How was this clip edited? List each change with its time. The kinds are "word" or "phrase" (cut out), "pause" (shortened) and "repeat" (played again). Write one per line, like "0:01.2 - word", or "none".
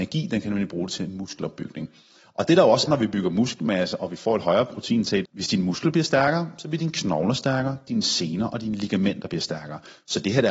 0:02.9 - word
0:05.2 - phrase